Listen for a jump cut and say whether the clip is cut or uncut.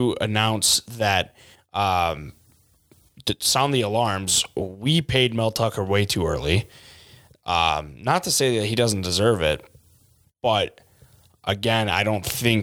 uncut